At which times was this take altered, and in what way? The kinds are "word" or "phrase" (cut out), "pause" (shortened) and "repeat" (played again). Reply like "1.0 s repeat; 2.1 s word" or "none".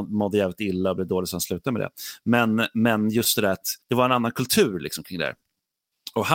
3.8 s pause